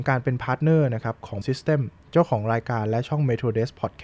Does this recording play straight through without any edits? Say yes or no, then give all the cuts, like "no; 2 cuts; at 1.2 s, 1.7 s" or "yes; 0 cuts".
no; 1 cut; at 1.4 s